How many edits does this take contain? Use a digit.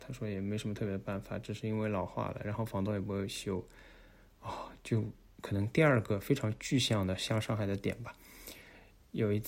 0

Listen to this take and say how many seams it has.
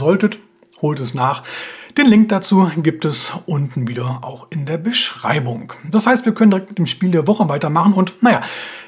0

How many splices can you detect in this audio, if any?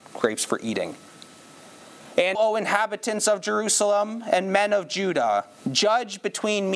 1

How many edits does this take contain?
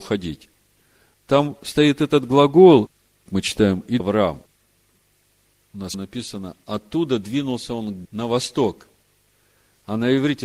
4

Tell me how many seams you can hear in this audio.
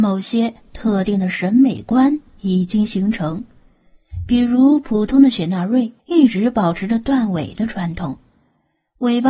1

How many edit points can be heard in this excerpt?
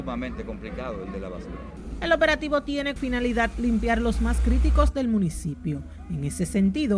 2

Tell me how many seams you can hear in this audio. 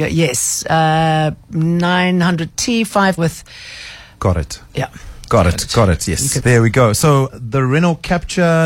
4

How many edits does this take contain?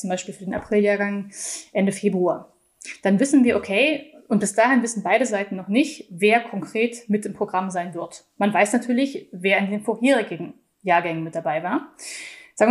0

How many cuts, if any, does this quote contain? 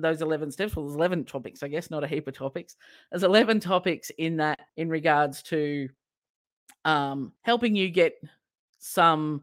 2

